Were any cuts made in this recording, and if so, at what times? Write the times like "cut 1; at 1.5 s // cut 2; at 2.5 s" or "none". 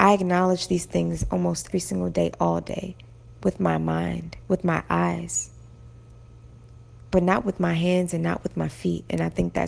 cut 1; at 1.7 s

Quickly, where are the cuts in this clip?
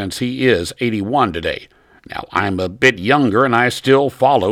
none

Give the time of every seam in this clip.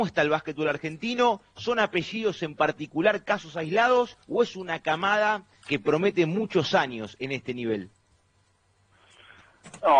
cut 1; at 4.2 s // cut 2; at 5.6 s

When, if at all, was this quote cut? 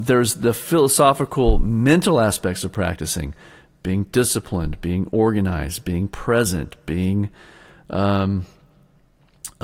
none

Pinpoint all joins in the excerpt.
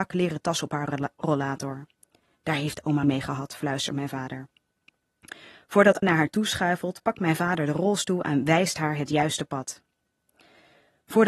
cut 1; at 3.0 s // cut 2; at 6.0 s

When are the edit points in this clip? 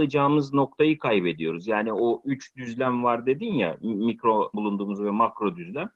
cut 1; at 4.5 s

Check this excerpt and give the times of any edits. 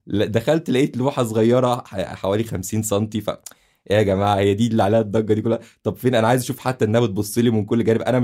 none

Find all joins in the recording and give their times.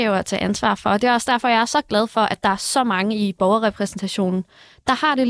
none

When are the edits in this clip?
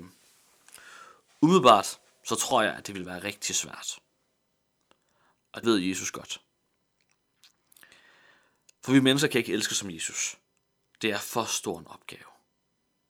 cut 1; at 5.6 s

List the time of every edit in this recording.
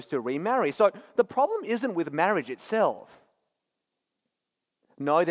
none

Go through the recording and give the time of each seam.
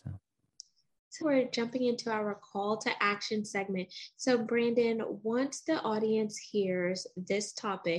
cut 1; at 1.2 s

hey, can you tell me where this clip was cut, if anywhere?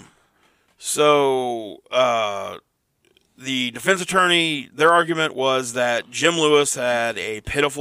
none

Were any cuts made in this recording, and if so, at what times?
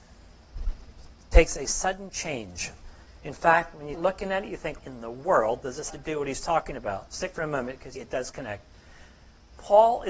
cut 1; at 3.9 s // cut 2; at 4.8 s // cut 3; at 5.9 s // cut 4; at 7.3 s // cut 5; at 8.0 s

